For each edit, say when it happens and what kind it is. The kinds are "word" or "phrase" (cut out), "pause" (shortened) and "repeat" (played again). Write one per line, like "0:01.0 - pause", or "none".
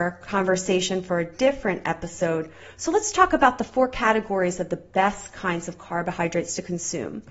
none